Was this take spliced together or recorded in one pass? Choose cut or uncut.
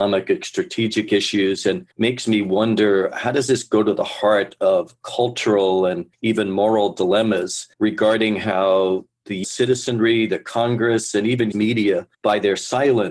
cut